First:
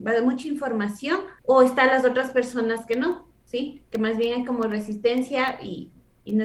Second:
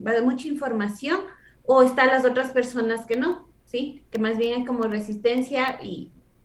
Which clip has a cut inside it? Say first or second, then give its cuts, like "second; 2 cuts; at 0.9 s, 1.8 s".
first; 1 cut; at 1.4 s